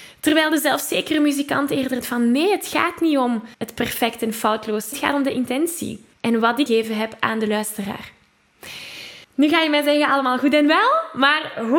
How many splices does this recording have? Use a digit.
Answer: 6